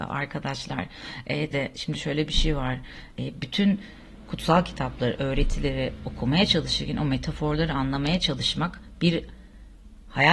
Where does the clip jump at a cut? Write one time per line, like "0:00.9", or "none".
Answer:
0:01.5